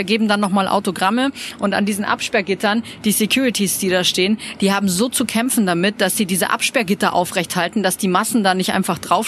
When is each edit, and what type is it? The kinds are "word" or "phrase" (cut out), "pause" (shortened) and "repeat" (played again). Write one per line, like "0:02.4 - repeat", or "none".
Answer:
none